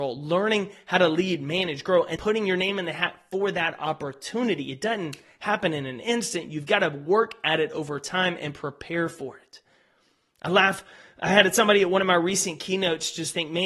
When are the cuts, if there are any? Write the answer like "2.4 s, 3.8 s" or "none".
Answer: 2.2 s